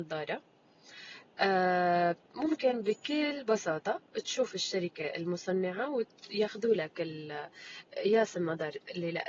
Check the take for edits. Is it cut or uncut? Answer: uncut